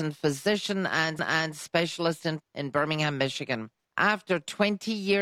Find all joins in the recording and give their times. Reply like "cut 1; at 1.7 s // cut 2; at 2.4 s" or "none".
cut 1; at 1.2 s // cut 2; at 2.4 s // cut 3; at 3.8 s